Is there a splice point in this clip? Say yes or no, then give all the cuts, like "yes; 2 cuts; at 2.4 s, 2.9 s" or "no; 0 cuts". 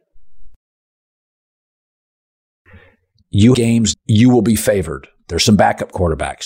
yes; 2 cuts; at 3.5 s, 3.9 s